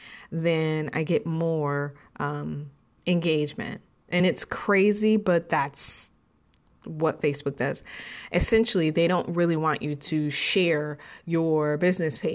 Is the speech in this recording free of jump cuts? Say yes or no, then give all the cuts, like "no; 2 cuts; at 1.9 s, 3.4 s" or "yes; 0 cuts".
yes; 0 cuts